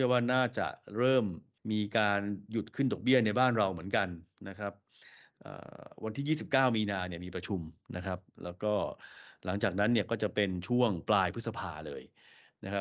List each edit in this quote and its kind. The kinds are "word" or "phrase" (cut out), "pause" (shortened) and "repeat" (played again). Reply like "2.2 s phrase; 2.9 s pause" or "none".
1.6 s pause